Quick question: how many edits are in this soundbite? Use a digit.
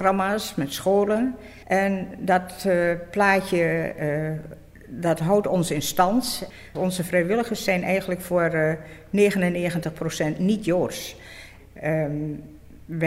1